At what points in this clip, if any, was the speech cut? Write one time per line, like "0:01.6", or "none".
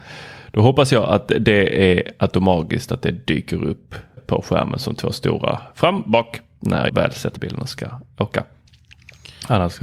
0:04.2
0:06.9
0:07.4